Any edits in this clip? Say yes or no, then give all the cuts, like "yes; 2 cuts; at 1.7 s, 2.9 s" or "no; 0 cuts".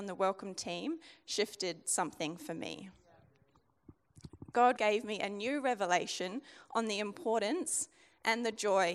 yes; 1 cut; at 4.8 s